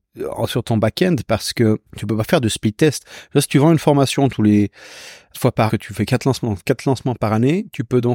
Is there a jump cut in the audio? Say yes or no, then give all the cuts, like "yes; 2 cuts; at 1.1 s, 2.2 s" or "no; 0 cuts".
yes; 3 cuts; at 1.9 s, 5.3 s, 5.7 s